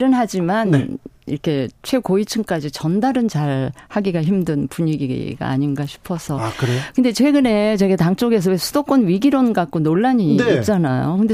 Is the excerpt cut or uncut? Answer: uncut